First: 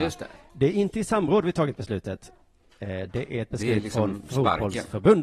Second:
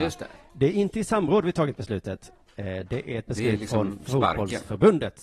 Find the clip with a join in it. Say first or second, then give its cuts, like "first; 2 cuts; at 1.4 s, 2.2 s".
second; 1 cut; at 2.5 s